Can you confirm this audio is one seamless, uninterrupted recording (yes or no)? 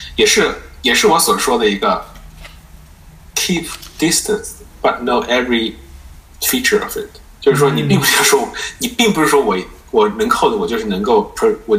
yes